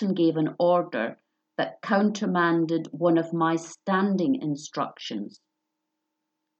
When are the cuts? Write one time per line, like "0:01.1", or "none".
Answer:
none